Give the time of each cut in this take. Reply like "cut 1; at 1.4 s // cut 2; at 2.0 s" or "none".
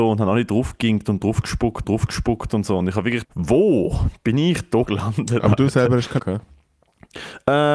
cut 1; at 1.8 s // cut 2; at 3.2 s // cut 3; at 4.8 s // cut 4; at 6.2 s